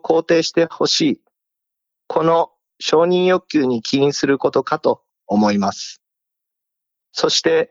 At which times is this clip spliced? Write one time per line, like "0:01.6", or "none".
none